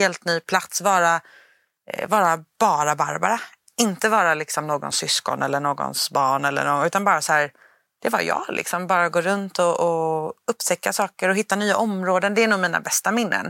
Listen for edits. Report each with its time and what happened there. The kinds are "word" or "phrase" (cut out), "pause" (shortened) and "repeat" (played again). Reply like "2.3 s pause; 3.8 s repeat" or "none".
none